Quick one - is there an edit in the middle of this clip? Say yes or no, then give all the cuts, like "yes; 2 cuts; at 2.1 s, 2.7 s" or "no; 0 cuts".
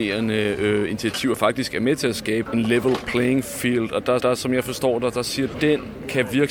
yes; 3 cuts; at 2.5 s, 4.2 s, 5.5 s